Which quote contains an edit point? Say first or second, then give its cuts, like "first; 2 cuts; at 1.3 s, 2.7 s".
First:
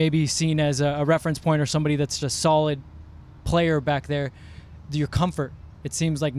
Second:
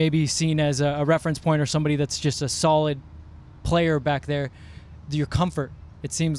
first; 1 cut; at 2.2 s